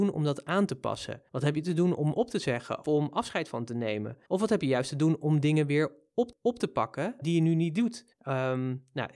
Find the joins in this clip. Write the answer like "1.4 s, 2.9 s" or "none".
1.3 s, 2.8 s, 4.2 s, 6.3 s, 7.2 s, 8.1 s